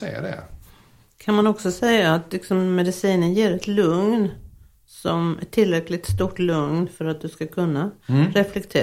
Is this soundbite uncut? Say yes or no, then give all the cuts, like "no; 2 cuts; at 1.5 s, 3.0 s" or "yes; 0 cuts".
yes; 0 cuts